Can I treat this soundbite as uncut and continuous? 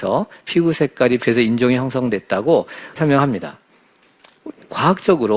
no; 2 cuts; at 1.2 s, 3.0 s

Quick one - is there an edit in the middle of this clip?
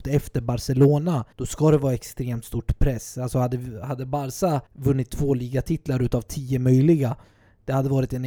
yes; 2 cuts; at 1.3 s, 4.7 s

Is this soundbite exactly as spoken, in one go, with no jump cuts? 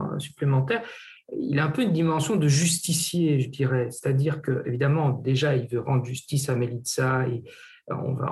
yes; 0 cuts

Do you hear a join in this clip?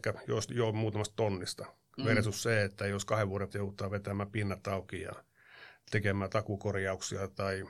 yes; 1 cut; at 3.5 s

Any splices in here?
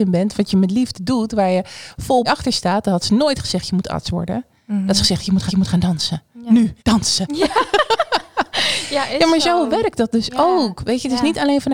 yes; 3 cuts; at 2.2 s, 5.5 s, 6.8 s

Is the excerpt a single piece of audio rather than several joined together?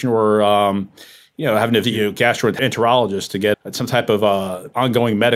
no; 2 cuts; at 1.8 s, 3.5 s

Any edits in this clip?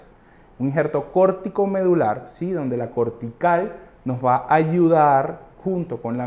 no; 0 cuts

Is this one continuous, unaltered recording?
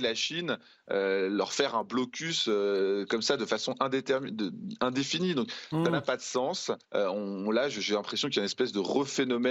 no; 1 cut; at 6.8 s

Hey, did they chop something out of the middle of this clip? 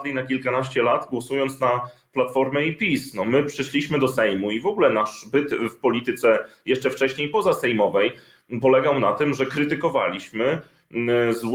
no; 0 cuts

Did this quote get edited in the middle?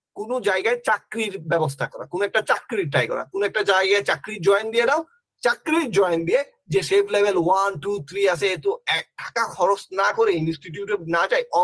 no; 0 cuts

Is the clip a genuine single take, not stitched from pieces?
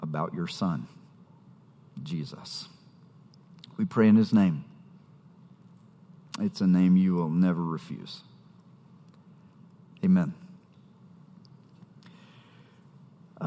yes; 0 cuts

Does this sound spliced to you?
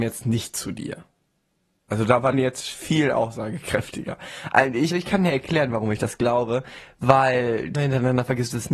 yes; 3 cuts; at 2.3 s, 4.9 s, 7.7 s

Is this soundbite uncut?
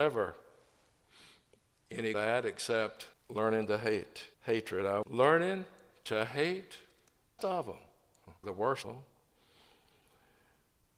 no; 7 cuts; at 2.1 s, 3.1 s, 4.3 s, 5.0 s, 7.4 s, 8.4 s, 8.8 s

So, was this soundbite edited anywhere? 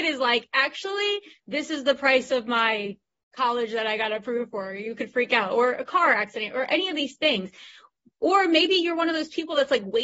no; 0 cuts

